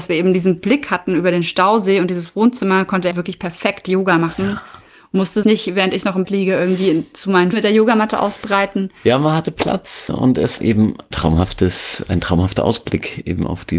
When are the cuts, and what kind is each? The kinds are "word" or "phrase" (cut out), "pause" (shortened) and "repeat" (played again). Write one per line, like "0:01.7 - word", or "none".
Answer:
0:03.1 - word
0:05.4 - word
0:06.2 - word
0:07.5 - word
0:10.1 - word
0:10.6 - word
0:11.1 - word